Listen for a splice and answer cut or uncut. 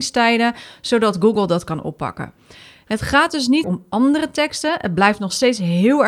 cut